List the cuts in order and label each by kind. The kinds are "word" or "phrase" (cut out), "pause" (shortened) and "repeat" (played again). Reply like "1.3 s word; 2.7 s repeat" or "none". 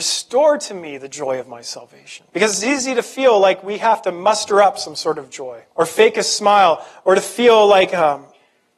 2.3 s pause; 5.7 s pause